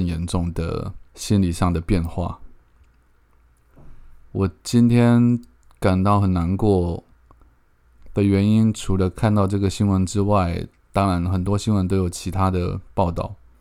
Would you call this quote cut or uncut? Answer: cut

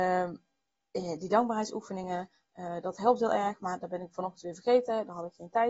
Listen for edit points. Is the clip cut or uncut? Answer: uncut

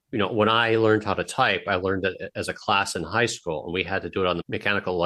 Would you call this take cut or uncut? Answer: uncut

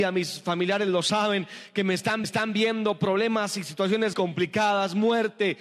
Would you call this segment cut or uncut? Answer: cut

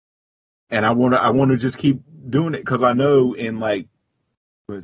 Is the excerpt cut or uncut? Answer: uncut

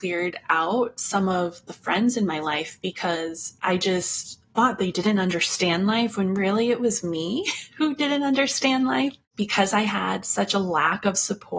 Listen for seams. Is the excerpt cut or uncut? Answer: cut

